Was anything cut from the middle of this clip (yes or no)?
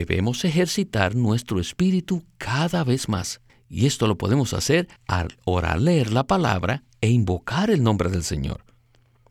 yes